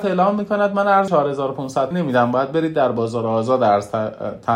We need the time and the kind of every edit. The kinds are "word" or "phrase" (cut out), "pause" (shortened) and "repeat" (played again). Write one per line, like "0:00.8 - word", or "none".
0:01.1 - word
0:01.9 - word